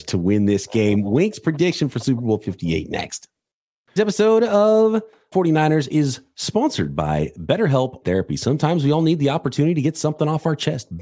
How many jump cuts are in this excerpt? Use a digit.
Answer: 3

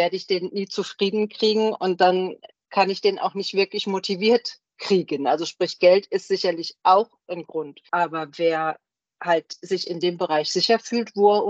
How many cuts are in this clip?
1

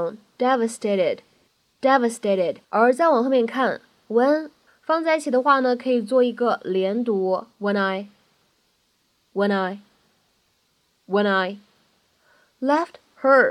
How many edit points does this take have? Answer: 3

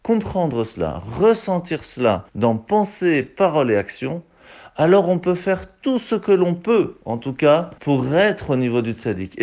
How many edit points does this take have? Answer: 2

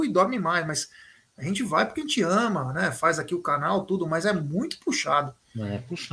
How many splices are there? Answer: 0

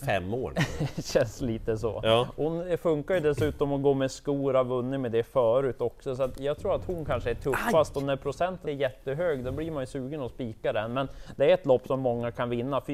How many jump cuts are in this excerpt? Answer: 1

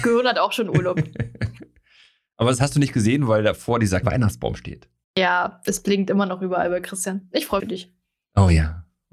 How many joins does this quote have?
3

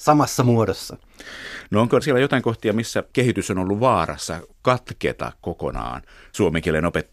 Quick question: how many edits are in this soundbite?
1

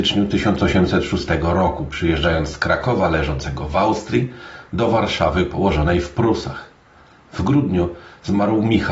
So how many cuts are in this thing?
0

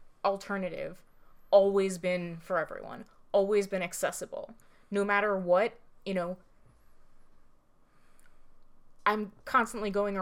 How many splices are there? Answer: 0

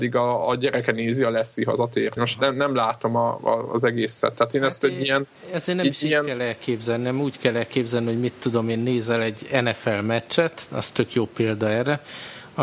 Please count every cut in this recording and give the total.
1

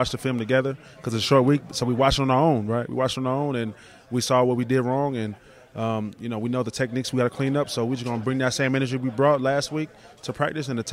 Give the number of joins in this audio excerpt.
0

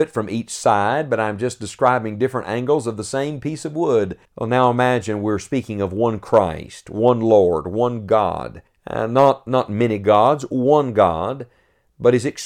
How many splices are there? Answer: 2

